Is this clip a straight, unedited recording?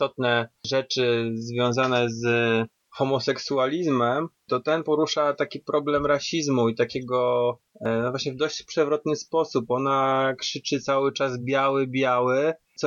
yes; 0 cuts

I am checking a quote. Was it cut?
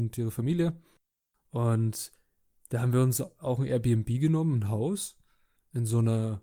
no; 0 cuts

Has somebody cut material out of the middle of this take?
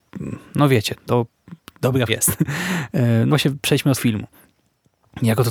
yes; 4 cuts; at 0.9 s, 2.1 s, 3.3 s, 3.9 s

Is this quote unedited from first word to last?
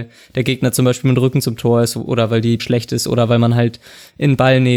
no; 1 cut; at 2.6 s

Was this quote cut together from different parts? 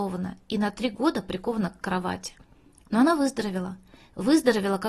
no; 0 cuts

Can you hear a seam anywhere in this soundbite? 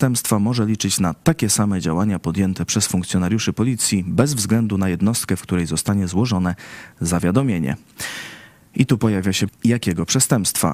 yes; 1 cut; at 9.5 s

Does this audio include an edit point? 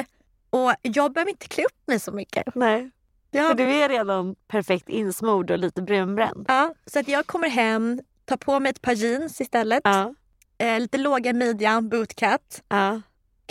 no; 0 cuts

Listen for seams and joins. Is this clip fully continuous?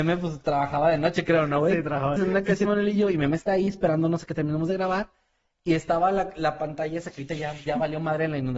no; 2 cuts; at 2.2 s, 2.7 s

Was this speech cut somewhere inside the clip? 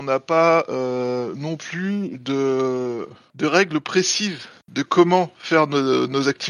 no; 0 cuts

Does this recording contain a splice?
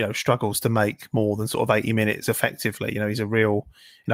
no; 0 cuts

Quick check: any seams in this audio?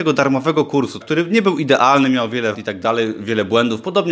yes; 2 cuts; at 1.0 s, 2.5 s

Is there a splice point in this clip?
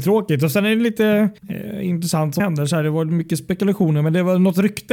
yes; 2 cuts; at 1.4 s, 2.4 s

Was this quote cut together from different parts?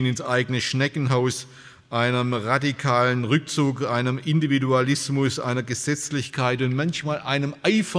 no; 0 cuts

